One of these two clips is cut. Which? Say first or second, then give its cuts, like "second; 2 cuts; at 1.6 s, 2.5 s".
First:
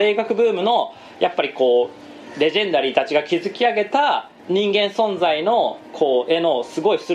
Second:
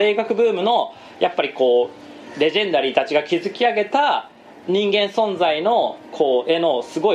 first; 1 cut; at 4.4 s